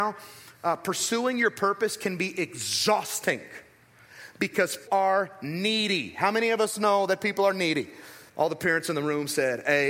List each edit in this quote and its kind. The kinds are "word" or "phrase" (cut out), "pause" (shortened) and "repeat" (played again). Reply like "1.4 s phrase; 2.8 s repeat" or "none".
4.9 s word; 8.3 s pause

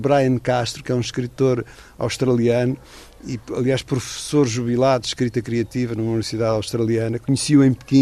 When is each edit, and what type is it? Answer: none

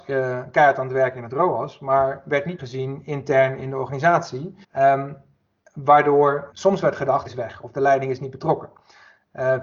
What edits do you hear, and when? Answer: 2.6 s word; 4.6 s pause; 6.5 s word; 7.3 s phrase

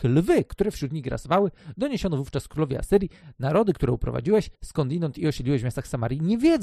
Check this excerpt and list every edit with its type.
4.5 s pause

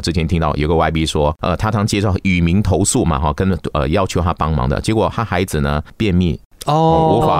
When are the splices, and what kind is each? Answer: none

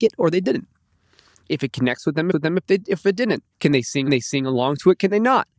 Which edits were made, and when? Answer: 2.3 s repeat; 3.5 s pause; 4.1 s repeat

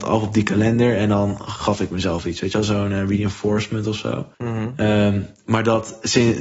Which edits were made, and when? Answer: 4.3 s pause

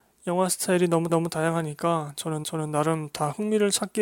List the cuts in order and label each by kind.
1.1 s repeat; 2.4 s repeat

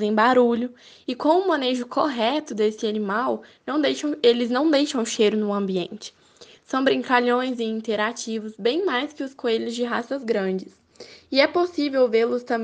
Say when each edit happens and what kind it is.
none

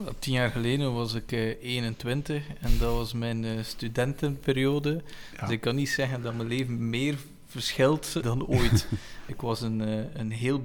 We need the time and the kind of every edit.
8.2 s word; 9.3 s word

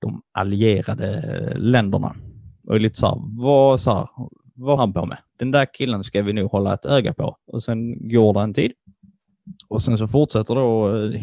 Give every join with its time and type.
4.8 s word; 5.3 s pause; 7.4 s pause

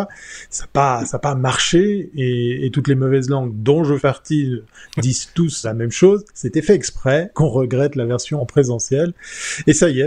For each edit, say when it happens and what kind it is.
4.0 s word; 5.6 s word; 7.3 s word; 8.4 s word

